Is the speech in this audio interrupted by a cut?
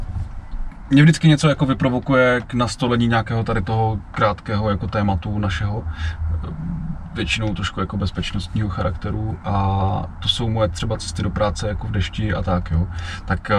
no; 0 cuts

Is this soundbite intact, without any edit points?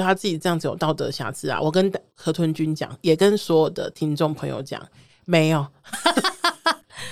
yes; 0 cuts

